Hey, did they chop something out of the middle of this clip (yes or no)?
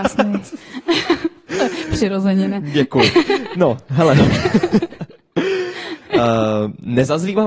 no